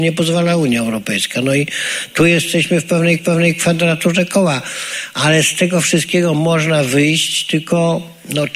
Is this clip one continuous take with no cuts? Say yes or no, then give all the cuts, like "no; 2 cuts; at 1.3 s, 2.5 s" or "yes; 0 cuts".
no; 1 cut; at 3.2 s